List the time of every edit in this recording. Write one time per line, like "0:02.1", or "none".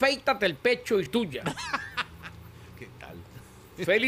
0:01.1